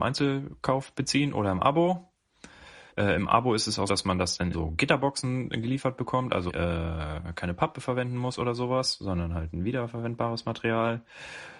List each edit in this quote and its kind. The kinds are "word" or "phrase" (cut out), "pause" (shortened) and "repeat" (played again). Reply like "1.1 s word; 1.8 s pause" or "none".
2.9 s pause; 3.9 s word; 4.5 s word; 6.5 s word